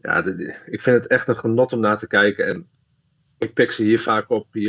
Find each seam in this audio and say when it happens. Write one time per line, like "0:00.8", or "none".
none